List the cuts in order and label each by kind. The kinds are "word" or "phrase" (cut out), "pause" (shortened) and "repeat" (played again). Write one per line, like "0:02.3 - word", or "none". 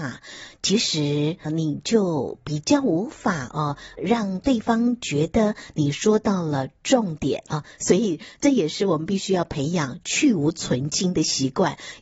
0:01.5 - word
0:04.0 - word
0:07.5 - pause